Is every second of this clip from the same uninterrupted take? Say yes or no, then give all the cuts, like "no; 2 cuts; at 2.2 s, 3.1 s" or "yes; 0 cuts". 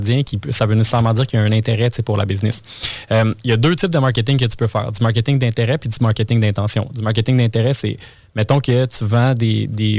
yes; 0 cuts